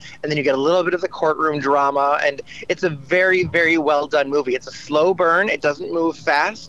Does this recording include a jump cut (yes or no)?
no